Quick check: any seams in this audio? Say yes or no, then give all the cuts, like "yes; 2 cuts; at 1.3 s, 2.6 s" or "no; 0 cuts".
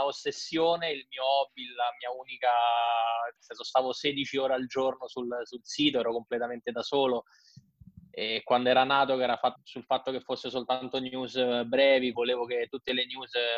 yes; 3 cuts; at 3.4 s, 9.6 s, 12.1 s